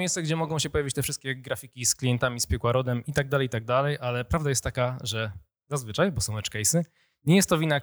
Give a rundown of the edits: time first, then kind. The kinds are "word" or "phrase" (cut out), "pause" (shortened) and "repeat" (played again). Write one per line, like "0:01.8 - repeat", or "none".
none